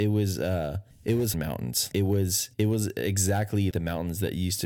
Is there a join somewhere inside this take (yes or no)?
yes